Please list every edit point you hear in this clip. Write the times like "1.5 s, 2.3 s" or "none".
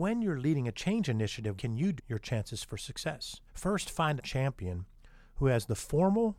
1.6 s, 2.0 s, 3.5 s, 4.2 s